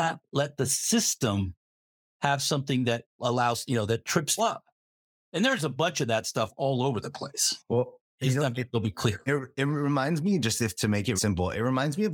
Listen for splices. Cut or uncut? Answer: cut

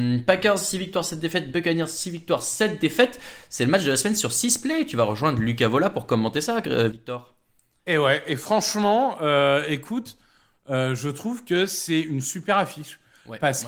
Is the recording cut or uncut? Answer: uncut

